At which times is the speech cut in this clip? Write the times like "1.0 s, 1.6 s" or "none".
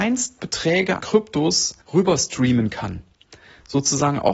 1.0 s, 1.8 s